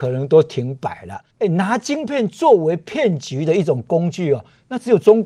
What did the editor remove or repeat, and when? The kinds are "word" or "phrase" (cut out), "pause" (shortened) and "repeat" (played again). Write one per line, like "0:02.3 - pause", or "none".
0:01.3 - pause